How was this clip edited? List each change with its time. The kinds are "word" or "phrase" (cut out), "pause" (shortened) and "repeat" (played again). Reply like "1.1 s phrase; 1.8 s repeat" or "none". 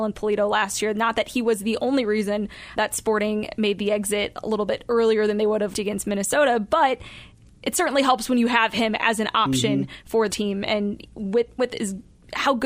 2.8 s word; 5.7 s word; 10.3 s word; 11.6 s word